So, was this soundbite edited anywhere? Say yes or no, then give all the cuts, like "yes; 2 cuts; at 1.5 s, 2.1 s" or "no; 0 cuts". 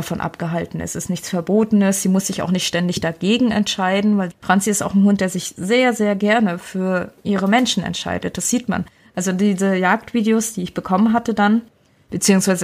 yes; 1 cut; at 4.3 s